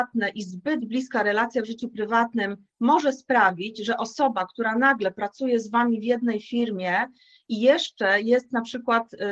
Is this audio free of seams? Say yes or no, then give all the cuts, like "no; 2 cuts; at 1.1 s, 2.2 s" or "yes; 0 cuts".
yes; 0 cuts